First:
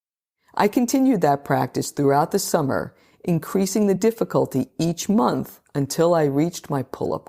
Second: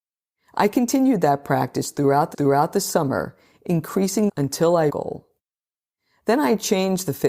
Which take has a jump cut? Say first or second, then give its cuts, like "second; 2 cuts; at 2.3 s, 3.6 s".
second; 3 cuts; at 2.3 s, 4.3 s, 4.9 s